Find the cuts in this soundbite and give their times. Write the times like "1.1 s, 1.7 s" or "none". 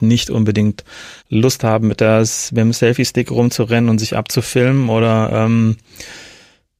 1.2 s

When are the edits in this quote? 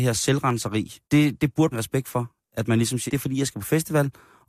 1.0 s, 1.7 s, 3.1 s

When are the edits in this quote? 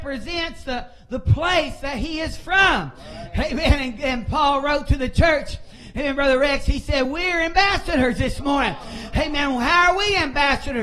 none

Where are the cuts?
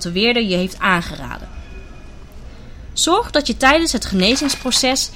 none

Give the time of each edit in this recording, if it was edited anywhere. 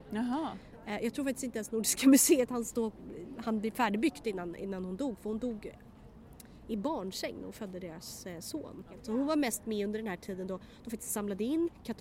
none

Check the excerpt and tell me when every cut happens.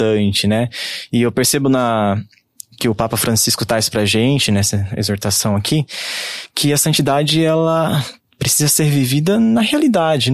none

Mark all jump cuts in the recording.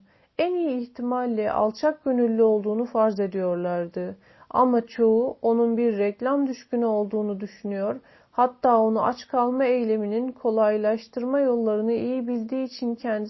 none

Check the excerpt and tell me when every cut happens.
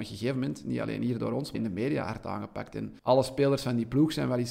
1.5 s, 3.0 s

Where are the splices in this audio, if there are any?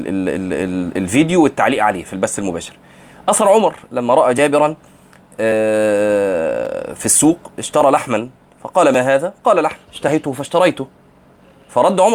none

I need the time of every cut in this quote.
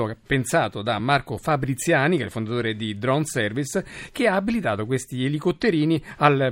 none

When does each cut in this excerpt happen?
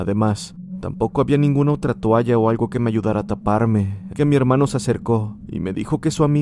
4.1 s

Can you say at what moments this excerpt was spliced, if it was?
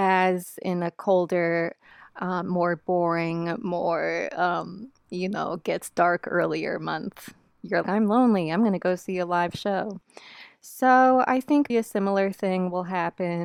7.8 s, 11.7 s

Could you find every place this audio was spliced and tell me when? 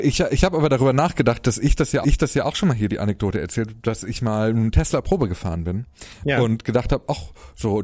2.0 s

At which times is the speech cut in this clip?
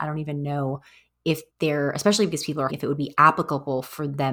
1.5 s, 2.7 s

